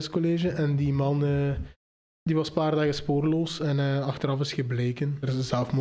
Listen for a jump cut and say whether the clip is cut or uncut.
uncut